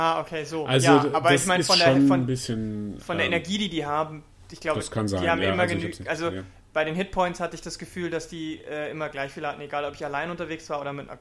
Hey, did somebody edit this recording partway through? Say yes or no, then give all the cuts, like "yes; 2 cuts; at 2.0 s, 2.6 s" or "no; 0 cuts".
no; 0 cuts